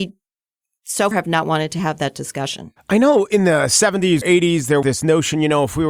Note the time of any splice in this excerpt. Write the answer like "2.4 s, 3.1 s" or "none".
1.1 s, 4.2 s, 4.8 s